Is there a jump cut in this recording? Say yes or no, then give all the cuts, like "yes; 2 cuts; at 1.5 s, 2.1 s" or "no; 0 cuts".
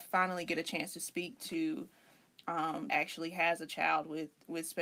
yes; 1 cut; at 2.9 s